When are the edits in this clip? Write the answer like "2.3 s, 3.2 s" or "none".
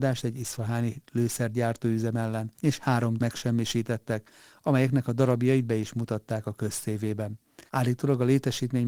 2.5 s, 3.2 s, 7.7 s